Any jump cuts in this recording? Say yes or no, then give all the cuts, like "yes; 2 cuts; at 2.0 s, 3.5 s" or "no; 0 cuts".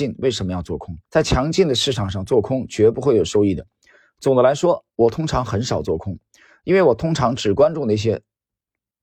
yes; 2 cuts; at 1.0 s, 4.9 s